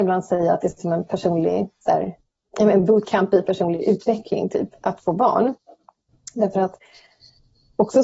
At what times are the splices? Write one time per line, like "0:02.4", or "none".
none